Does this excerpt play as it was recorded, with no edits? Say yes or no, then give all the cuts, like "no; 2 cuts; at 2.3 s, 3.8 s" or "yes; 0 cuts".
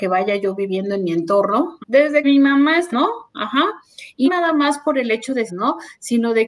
no; 5 cuts; at 1.8 s, 2.2 s, 2.9 s, 4.2 s, 5.5 s